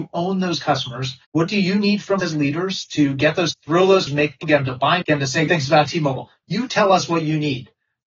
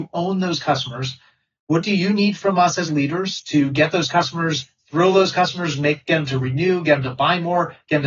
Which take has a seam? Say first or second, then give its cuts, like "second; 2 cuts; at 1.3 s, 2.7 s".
first; 7 cuts; at 1.2 s, 2.2 s, 3.5 s, 4.1 s, 4.4 s, 5.0 s, 5.5 s